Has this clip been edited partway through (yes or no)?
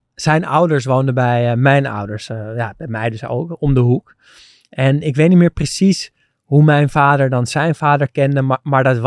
no